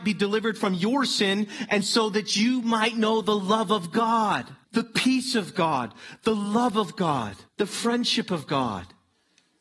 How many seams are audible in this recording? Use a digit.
2